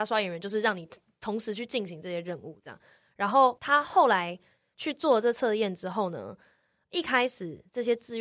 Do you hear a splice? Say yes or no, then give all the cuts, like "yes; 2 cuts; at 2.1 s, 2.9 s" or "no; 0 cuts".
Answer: no; 0 cuts